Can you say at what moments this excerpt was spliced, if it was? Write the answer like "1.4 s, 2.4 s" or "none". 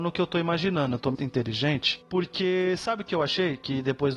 1.1 s